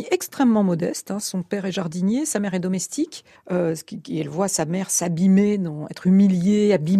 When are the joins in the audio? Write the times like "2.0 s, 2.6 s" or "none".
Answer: 3.3 s